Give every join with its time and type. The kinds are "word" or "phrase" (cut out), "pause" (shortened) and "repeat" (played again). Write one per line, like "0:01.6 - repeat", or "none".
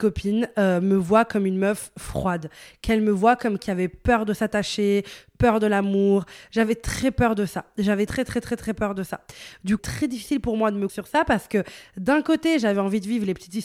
0:03.6 - word
0:08.1 - word
0:09.8 - phrase
0:10.9 - word